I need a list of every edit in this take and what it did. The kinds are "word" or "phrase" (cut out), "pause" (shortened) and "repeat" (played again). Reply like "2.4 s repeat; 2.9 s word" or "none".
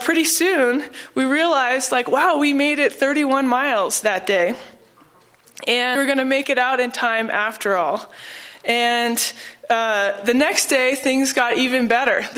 6.0 s word